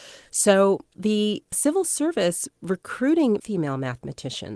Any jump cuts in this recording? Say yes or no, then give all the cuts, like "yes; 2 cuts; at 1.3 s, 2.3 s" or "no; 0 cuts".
yes; 2 cuts; at 2.5 s, 3.4 s